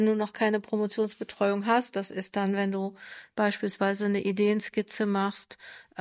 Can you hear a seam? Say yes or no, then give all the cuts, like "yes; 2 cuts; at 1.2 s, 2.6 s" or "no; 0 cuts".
no; 0 cuts